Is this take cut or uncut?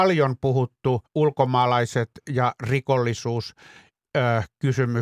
cut